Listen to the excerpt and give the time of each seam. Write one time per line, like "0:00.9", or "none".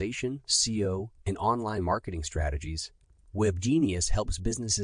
none

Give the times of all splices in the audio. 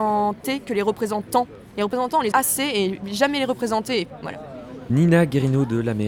0:02.3

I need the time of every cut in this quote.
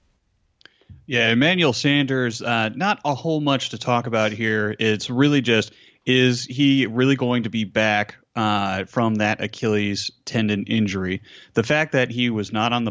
none

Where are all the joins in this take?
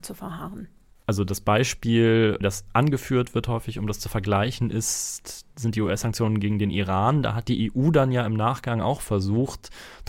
none

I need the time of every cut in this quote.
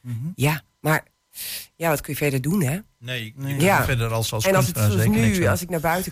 none

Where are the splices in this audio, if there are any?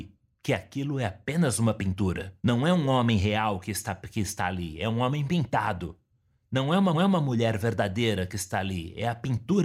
0:02.4
0:06.9

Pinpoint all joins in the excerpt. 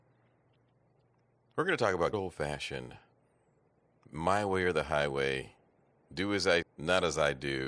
0:02.1
0:06.6

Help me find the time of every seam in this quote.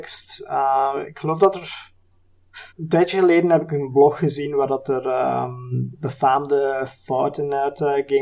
0:02.7

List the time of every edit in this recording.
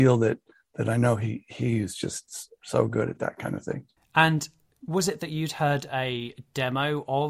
none

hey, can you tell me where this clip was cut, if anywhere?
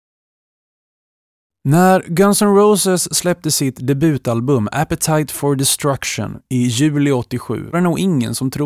0:07.7

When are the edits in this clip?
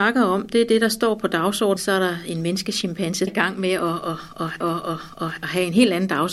0:01.8
0:03.3
0:04.6

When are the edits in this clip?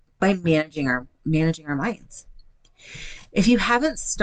0:01.1

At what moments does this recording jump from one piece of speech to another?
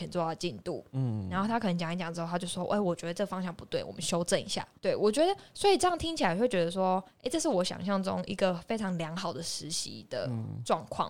0:04.8

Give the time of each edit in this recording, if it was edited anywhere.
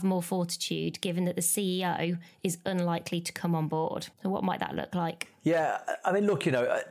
0:04.1

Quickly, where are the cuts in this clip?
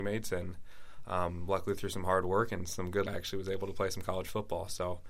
0:03.1

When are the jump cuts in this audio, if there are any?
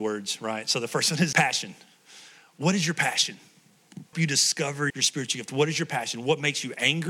0:01.3
0:04.1
0:04.9

